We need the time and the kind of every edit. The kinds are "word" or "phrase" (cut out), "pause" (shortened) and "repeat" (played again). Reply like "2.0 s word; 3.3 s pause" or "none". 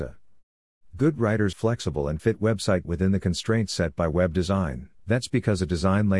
1.5 s word; 2.2 s word; 2.8 s word; 5.0 s pause